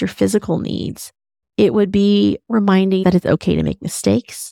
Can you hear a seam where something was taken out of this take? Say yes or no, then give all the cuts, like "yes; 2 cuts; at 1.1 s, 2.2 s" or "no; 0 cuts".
yes; 1 cut; at 3.0 s